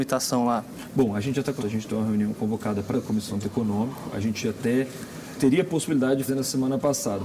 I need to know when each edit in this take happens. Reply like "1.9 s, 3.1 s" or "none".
1.6 s, 2.9 s, 3.4 s, 5.4 s, 6.3 s